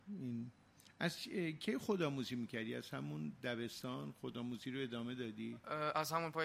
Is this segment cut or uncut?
uncut